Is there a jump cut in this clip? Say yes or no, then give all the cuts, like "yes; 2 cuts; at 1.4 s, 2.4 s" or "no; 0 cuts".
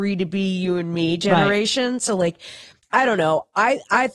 yes; 1 cut; at 2.8 s